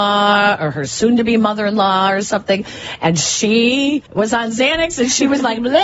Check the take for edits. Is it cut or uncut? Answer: cut